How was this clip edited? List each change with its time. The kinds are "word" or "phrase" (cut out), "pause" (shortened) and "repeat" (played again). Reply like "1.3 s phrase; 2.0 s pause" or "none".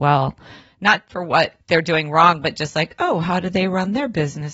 1.6 s pause